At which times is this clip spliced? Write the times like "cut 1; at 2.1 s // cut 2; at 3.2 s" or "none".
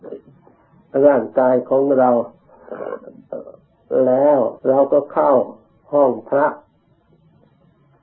cut 1; at 4.6 s